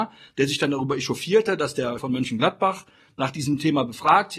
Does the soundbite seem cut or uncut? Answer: cut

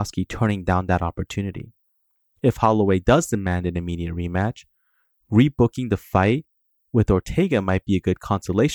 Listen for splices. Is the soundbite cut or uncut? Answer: uncut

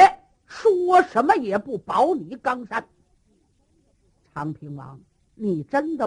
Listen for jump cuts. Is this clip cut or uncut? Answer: uncut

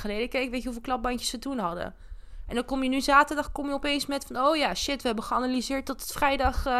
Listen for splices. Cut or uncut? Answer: uncut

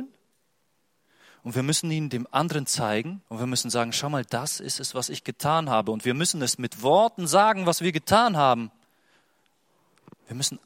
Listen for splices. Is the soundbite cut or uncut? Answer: cut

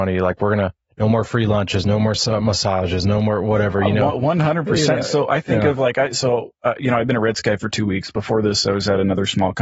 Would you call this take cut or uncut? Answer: uncut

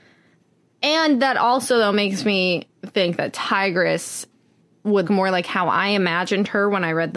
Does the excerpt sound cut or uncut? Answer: cut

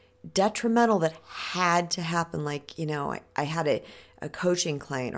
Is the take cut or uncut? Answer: uncut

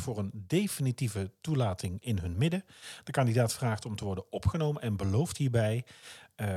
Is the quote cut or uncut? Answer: uncut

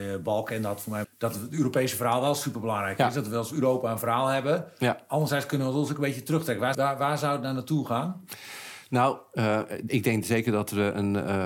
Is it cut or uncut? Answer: cut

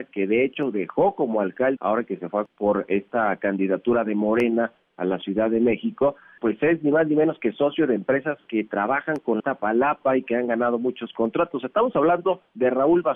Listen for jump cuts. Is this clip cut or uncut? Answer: cut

